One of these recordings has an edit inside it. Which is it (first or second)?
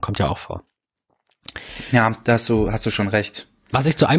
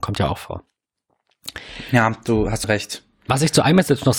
second